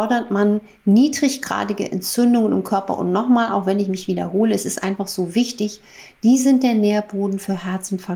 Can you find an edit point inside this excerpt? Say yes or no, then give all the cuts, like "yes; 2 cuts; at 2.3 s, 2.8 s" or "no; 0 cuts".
no; 0 cuts